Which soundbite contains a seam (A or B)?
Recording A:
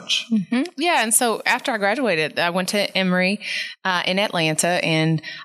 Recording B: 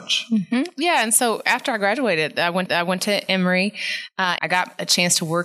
B